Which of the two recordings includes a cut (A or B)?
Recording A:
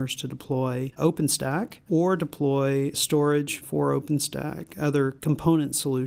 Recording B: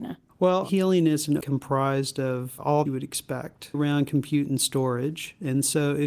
B